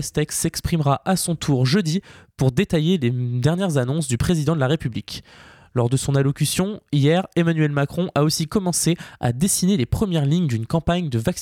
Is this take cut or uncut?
uncut